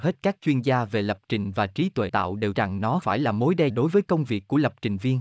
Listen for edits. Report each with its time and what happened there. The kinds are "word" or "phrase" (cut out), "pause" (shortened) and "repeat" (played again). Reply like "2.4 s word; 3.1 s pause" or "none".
2.1 s word; 2.5 s word; 3.0 s word; 3.7 s word